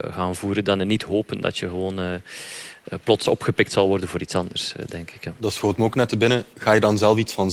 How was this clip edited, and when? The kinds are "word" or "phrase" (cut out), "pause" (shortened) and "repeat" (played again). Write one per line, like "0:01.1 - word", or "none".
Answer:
none